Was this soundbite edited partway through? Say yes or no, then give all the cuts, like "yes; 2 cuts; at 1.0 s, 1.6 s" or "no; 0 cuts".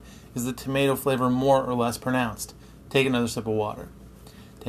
no; 0 cuts